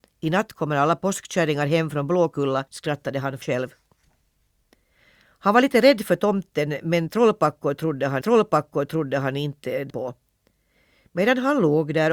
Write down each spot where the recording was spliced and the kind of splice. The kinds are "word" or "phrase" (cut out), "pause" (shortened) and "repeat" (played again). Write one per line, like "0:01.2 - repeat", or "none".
0:02.7 - pause
0:03.4 - word
0:08.2 - repeat
0:09.9 - word